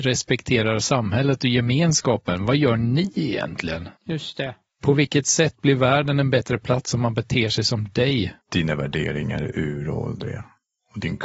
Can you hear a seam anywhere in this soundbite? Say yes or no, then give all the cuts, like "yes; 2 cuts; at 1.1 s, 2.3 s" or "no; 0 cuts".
yes; 2 cuts; at 4.0 s, 8.4 s